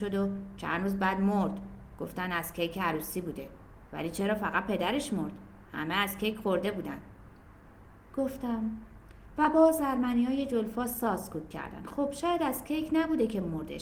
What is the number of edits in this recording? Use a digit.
0